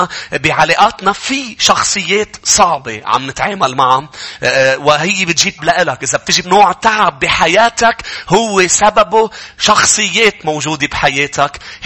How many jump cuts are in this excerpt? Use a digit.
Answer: 2